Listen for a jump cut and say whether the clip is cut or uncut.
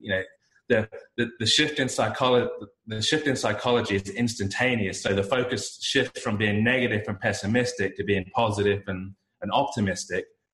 uncut